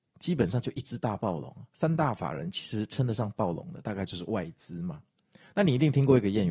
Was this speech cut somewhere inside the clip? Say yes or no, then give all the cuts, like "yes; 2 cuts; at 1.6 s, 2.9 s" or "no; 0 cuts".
no; 0 cuts